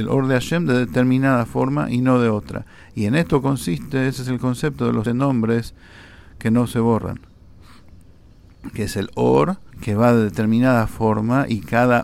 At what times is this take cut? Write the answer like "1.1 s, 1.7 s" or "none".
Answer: 5.1 s, 9.7 s

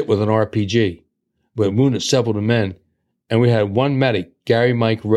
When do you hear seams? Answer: none

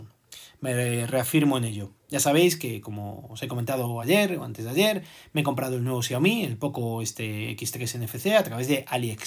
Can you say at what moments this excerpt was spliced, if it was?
none

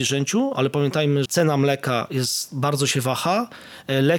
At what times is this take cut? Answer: 1.2 s

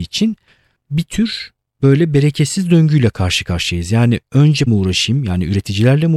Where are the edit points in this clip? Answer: 4.7 s

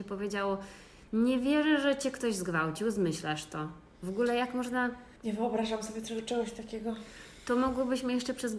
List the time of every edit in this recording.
1.1 s, 5.2 s

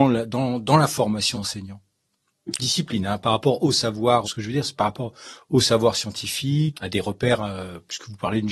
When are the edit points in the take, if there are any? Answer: 1.3 s, 2.6 s, 3.2 s, 4.2 s, 6.7 s

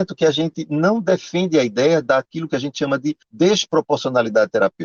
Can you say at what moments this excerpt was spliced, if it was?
3.2 s

